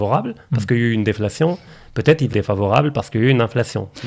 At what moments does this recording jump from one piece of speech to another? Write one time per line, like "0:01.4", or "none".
0:02.3

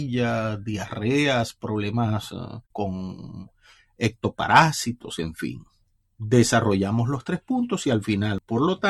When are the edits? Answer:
0:02.6
0:06.0

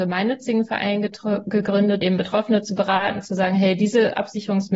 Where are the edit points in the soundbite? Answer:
0:02.0

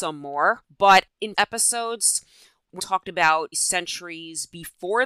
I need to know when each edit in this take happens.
0:01.3
0:02.8
0:03.5

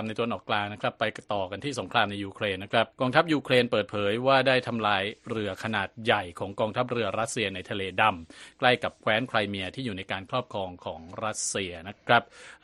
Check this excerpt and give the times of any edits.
0:02.9

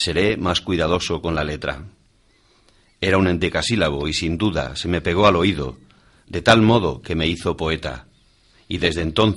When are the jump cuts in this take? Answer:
none

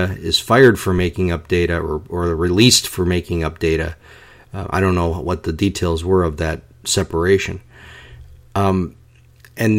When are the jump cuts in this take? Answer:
none

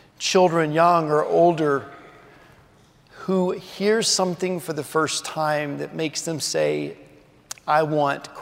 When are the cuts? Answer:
none

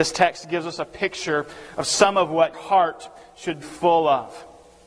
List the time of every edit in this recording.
0:02.5
0:03.6

